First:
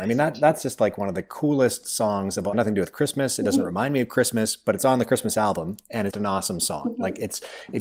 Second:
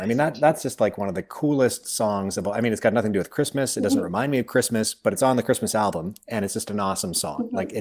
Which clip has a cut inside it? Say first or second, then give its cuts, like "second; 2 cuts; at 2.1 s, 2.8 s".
first; 2 cuts; at 2.5 s, 6.1 s